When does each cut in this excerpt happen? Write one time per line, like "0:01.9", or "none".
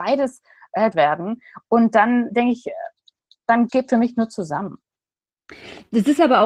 0:00.9
0:02.3
0:03.7